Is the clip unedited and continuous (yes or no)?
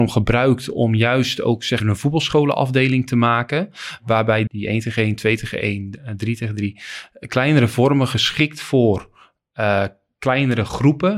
no